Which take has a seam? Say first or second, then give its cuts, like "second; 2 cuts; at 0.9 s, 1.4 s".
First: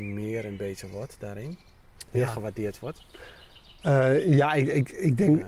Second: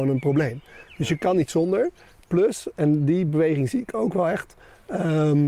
first; 1 cut; at 2.1 s